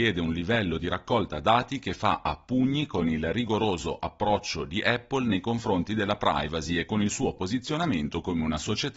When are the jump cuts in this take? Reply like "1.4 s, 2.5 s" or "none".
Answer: none

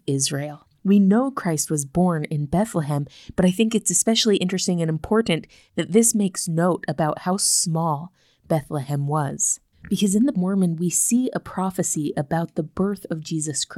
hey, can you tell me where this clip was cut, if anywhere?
10.3 s

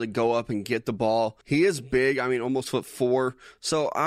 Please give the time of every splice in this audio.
1.4 s, 2.6 s

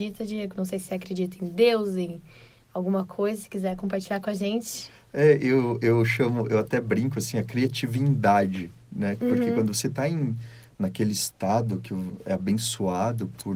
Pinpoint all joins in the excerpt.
none

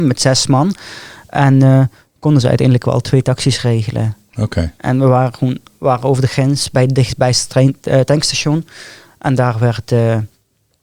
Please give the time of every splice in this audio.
none

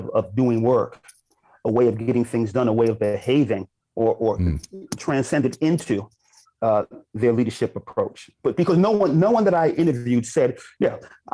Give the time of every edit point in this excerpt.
3.8 s

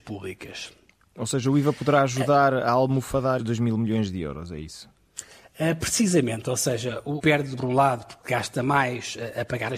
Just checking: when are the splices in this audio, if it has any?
3.4 s, 7.2 s, 7.6 s

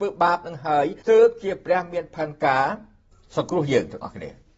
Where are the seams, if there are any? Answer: 1.0 s

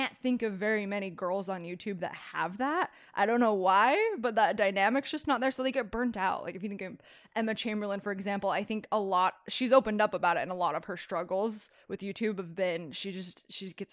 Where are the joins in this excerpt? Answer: none

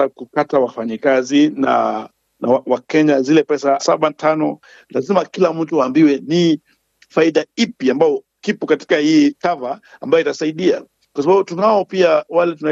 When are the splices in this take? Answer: 3.8 s

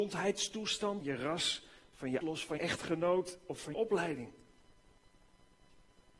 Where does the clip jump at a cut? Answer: 1.0 s, 2.2 s, 2.6 s, 3.7 s

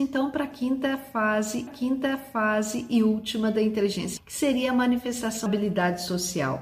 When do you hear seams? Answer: 1.7 s, 4.2 s, 5.5 s

